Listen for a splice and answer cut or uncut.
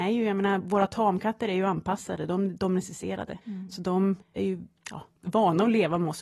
cut